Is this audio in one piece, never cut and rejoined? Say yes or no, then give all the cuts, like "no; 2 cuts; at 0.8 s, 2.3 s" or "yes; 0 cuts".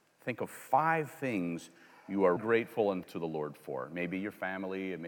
no; 2 cuts; at 2.4 s, 3.0 s